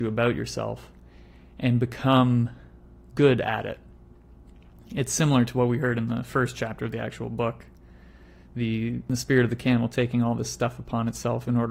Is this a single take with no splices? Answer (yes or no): yes